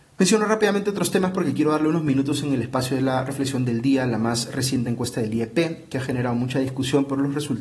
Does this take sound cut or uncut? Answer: uncut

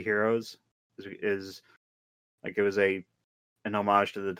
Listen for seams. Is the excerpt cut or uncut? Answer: uncut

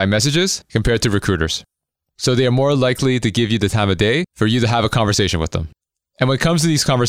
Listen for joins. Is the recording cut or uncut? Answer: uncut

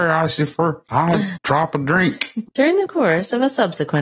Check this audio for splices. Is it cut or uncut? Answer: cut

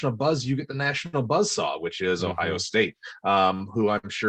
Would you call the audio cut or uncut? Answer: uncut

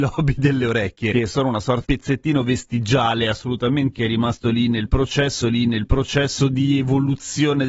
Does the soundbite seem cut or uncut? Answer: cut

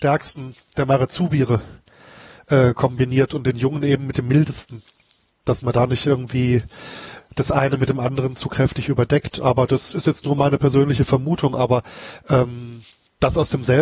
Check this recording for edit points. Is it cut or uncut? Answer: uncut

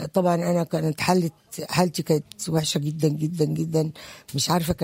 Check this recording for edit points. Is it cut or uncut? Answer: uncut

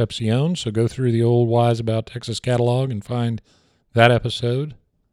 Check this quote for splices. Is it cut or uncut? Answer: uncut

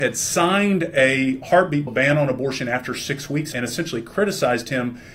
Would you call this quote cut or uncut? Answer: cut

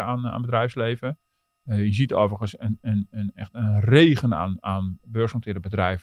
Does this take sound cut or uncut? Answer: uncut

